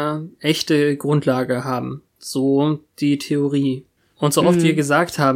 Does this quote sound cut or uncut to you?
cut